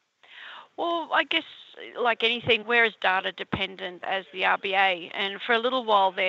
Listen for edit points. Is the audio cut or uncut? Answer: cut